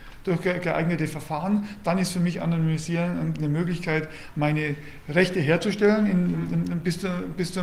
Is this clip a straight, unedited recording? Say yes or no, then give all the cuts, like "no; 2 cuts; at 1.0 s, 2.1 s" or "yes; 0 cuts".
yes; 0 cuts